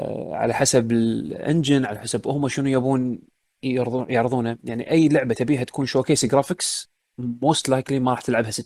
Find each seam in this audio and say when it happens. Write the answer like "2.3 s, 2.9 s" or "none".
none